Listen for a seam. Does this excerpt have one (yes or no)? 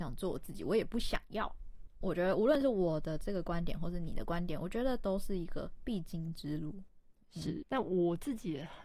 yes